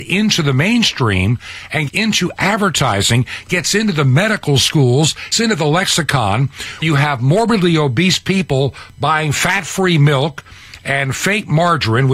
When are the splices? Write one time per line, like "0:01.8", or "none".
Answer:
0:01.9
0:05.3
0:06.8